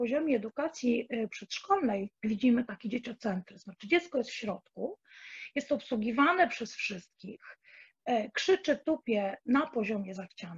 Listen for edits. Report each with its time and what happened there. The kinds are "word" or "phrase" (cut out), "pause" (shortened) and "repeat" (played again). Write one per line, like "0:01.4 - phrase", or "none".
0:02.2 - pause